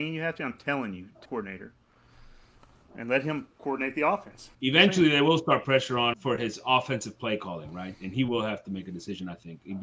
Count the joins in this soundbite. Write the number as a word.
four